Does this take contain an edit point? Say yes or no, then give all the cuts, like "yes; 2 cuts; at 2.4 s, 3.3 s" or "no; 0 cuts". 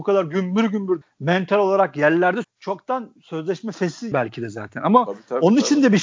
yes; 3 cuts; at 1.0 s, 2.4 s, 4.1 s